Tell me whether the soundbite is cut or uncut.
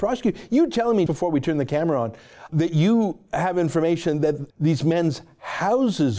cut